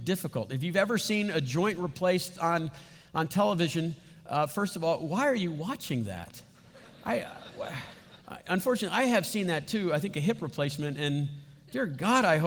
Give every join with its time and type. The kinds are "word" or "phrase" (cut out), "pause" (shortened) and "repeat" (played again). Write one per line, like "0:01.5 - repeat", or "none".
0:08.2 - pause

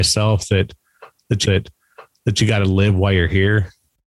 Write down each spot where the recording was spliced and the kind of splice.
0:01.4 - repeat

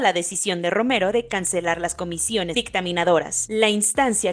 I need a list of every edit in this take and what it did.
0:02.5 - word

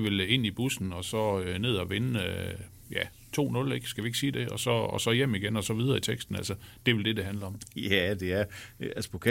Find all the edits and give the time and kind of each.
none

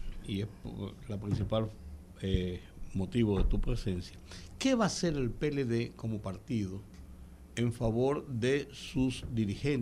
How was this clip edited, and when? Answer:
none

